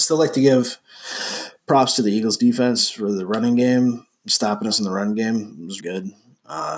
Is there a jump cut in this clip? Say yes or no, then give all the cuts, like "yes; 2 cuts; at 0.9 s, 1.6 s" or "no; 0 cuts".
yes; 1 cut; at 5.8 s